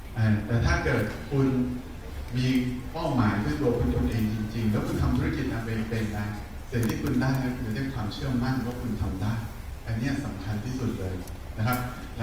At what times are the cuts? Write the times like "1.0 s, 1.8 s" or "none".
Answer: 3.9 s